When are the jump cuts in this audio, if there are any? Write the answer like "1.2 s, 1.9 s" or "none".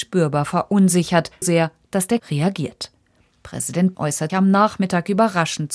1.4 s, 2.2 s, 3.9 s, 4.3 s